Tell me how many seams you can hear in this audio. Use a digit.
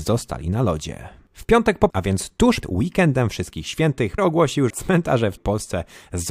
5